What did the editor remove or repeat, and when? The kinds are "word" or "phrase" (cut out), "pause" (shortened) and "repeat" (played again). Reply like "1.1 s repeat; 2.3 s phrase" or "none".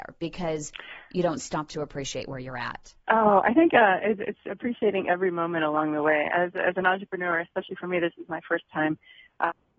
3.0 s pause